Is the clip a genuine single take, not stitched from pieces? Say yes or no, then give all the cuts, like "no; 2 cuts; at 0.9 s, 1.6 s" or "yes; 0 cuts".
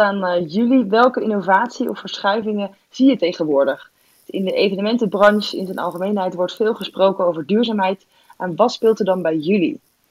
yes; 0 cuts